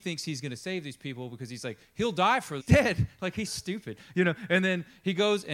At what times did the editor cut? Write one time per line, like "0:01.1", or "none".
0:02.6
0:03.5